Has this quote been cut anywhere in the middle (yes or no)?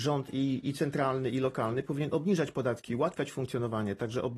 no